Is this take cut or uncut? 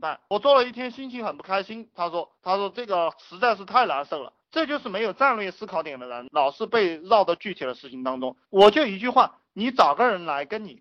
cut